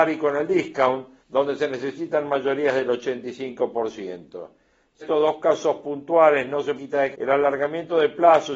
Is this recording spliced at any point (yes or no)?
yes